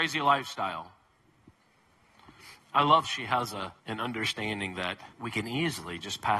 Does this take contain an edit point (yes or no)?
yes